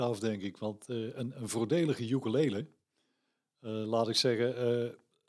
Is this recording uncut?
yes; 0 cuts

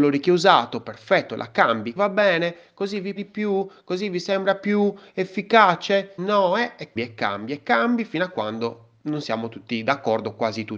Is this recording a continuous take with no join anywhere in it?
no; 4 cuts; at 2.0 s, 3.2 s, 6.2 s, 7.0 s

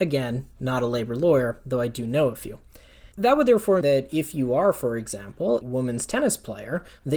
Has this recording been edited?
yes; 3 cuts; at 3.1 s, 3.8 s, 5.6 s

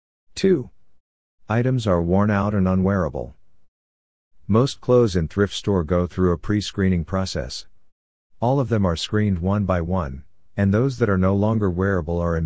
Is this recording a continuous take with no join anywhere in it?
yes; 0 cuts

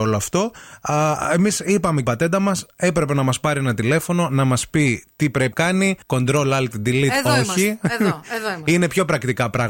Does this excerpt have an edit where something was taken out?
yes; 3 cuts; at 2.0 s, 5.5 s, 6.0 s

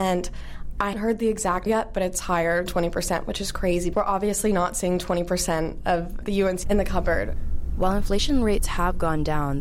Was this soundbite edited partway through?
yes; 6 cuts; at 0.9 s, 1.7 s, 2.7 s, 3.9 s, 6.2 s, 6.6 s

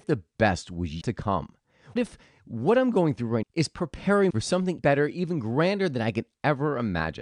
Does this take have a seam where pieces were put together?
yes; 5 cuts; at 1.0 s, 2.0 s, 3.4 s, 4.3 s, 4.8 s

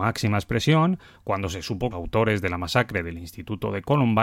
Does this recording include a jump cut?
yes; 1 cut; at 1.9 s

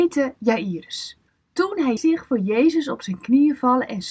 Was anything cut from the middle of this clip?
yes; 2 cuts; at 1.3 s, 2.0 s

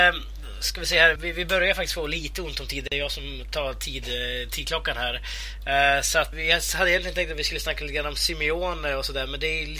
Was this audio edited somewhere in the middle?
yes; 2 cuts; at 1.2 s, 6.3 s

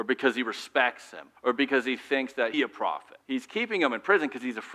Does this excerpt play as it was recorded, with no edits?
no; 3 cuts; at 1.4 s, 2.5 s, 3.2 s

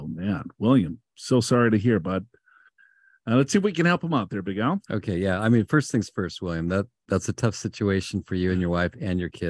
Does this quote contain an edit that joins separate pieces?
no; 0 cuts

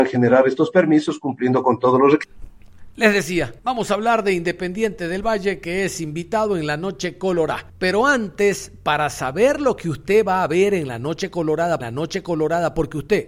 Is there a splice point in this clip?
yes; 3 cuts; at 3.6 s, 7.7 s, 11.8 s

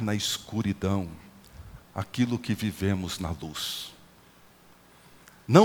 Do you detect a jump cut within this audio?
no; 0 cuts

